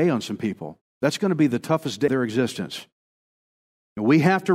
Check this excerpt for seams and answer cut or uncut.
cut